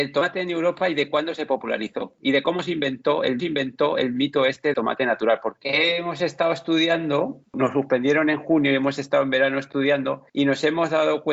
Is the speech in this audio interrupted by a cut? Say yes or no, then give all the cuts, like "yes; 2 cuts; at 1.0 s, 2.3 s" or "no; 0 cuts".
yes; 3 cuts; at 3.4 s, 4.7 s, 10.3 s